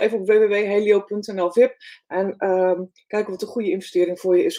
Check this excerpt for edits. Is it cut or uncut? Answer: uncut